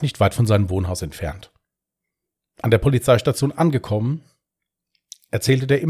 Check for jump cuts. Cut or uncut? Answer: uncut